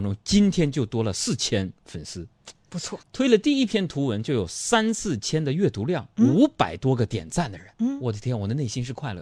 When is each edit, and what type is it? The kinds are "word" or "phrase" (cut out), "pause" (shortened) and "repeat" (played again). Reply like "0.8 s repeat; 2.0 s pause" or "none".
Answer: 3.0 s pause; 7.7 s pause

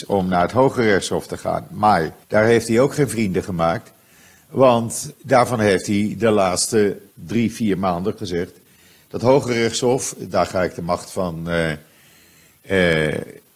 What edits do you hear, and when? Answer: 2.2 s pause; 5.1 s word; 7.1 s pause; 8.2 s word

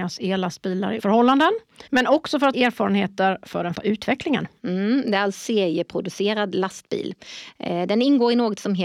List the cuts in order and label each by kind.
1.0 s word; 1.9 s pause; 2.5 s word; 3.7 s word; 5.3 s word

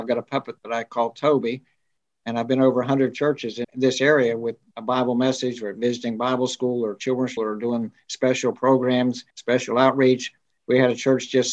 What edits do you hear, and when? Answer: 3.6 s word; 4.6 s word; 7.4 s phrase; 9.3 s pause

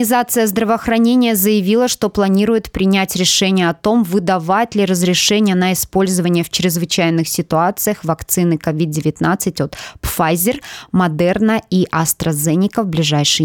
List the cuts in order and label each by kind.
none

